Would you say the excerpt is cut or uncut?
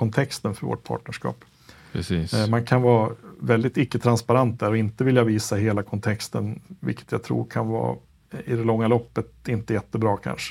uncut